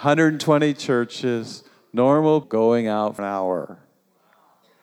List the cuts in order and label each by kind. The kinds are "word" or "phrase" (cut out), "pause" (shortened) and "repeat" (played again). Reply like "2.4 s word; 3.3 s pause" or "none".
2.4 s word; 3.2 s word